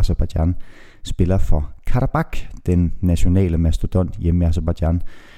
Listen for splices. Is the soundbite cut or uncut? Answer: uncut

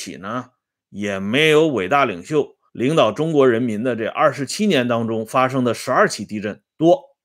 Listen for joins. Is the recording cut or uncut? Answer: cut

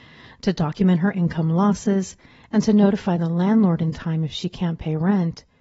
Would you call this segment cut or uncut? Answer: uncut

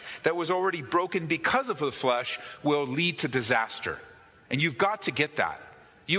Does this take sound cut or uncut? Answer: uncut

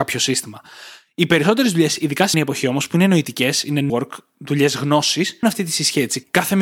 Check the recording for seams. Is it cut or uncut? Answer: cut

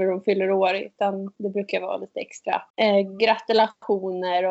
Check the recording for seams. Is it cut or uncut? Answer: cut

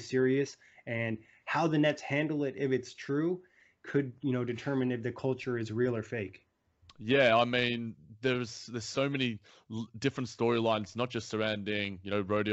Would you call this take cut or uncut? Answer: uncut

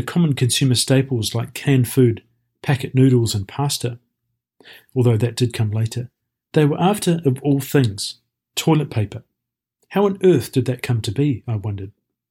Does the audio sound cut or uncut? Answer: uncut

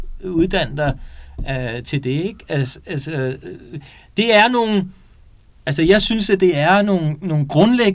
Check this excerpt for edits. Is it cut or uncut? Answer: uncut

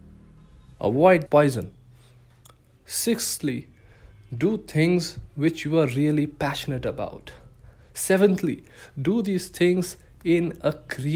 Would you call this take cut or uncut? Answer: cut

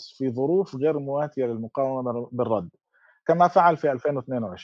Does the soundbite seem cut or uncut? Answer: uncut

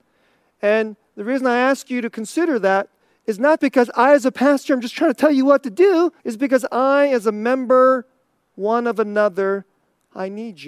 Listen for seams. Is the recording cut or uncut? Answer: cut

